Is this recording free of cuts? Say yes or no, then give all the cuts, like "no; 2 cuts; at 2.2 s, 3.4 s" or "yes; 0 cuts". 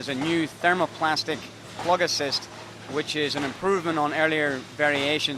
yes; 0 cuts